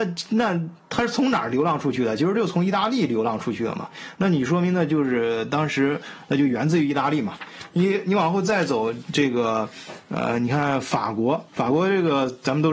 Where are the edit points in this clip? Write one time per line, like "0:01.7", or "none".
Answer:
0:11.5

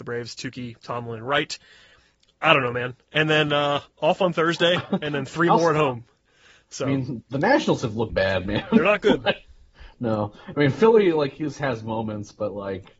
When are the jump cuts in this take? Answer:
0:07.2
0:08.1

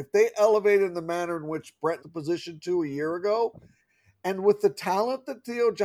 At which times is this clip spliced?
0:02.0

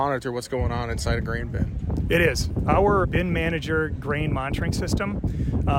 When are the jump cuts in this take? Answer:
0:03.0

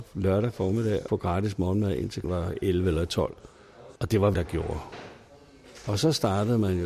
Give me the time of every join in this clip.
0:01.1
0:02.2
0:04.0
0:04.3

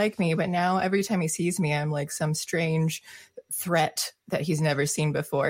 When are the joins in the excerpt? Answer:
none

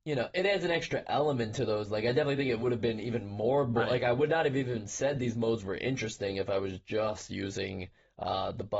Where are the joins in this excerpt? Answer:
none

